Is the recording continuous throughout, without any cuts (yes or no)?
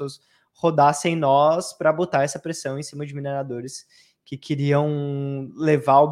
yes